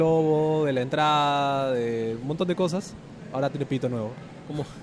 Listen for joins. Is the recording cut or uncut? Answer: uncut